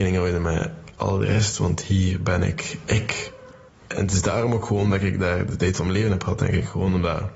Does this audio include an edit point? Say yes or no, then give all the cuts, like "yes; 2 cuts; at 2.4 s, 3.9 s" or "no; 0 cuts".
yes; 1 cut; at 3.7 s